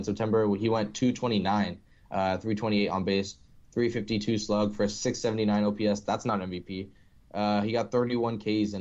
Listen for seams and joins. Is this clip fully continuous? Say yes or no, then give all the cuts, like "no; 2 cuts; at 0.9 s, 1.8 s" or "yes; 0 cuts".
yes; 0 cuts